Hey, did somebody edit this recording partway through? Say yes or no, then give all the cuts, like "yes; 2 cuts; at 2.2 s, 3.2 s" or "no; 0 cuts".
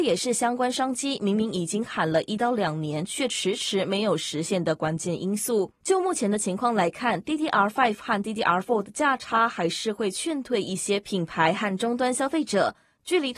yes; 1 cut; at 5.8 s